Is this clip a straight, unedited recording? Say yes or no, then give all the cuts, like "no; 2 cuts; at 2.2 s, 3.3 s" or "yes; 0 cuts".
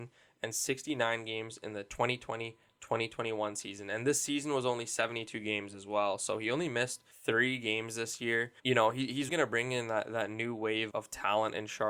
no; 4 cuts; at 7.1 s, 8.6 s, 9.3 s, 10.9 s